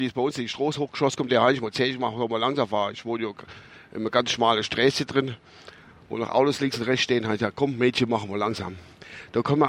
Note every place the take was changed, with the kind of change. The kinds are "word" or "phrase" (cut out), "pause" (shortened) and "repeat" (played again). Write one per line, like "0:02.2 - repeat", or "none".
none